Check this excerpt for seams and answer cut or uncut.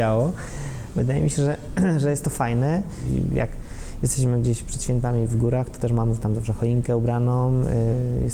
uncut